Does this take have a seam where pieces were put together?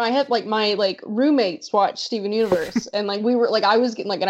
no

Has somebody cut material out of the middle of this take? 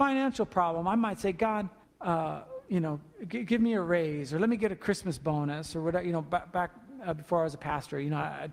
yes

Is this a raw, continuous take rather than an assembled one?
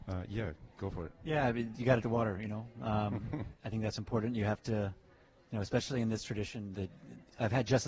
no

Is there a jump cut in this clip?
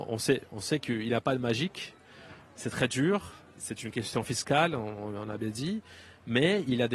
no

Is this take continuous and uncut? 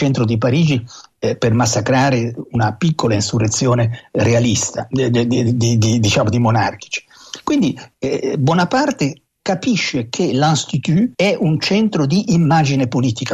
no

